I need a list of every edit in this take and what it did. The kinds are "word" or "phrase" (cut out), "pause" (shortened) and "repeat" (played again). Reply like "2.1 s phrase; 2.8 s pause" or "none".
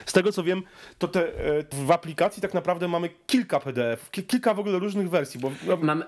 1.7 s word

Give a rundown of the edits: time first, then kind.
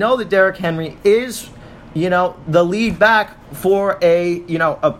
none

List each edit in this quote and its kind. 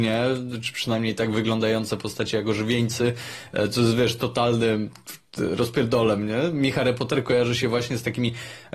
none

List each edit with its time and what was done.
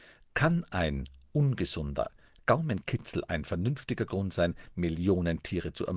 none

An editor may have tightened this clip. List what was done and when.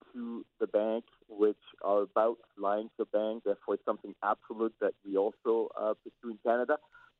none

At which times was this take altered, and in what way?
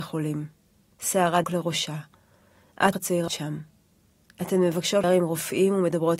1.4 s word; 2.9 s word; 3.3 s word; 5.0 s word

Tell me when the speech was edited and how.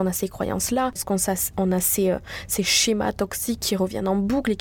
1.0 s word

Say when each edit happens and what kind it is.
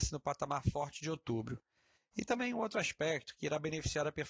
2.3 s word

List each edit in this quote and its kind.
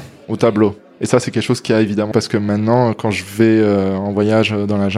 2.1 s word

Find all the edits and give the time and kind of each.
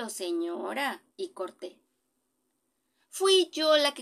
1.1 s pause

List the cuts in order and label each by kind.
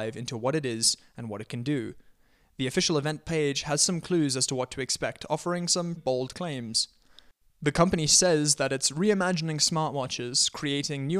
6.0 s word

